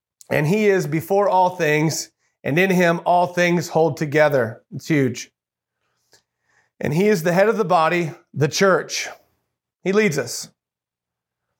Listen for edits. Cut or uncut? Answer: uncut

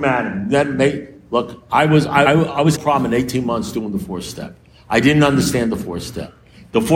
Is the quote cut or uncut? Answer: cut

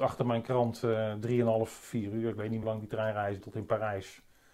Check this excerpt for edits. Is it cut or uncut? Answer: cut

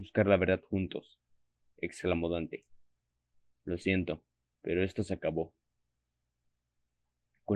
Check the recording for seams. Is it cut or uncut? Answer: uncut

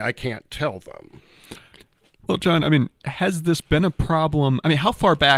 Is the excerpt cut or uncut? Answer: uncut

